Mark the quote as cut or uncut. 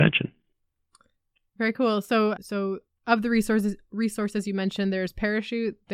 cut